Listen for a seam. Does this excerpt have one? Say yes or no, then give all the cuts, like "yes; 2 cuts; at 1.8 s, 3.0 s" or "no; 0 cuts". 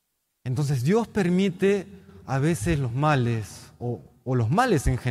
no; 0 cuts